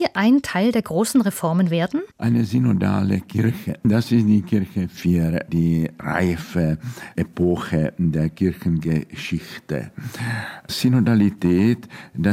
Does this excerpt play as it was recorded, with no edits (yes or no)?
no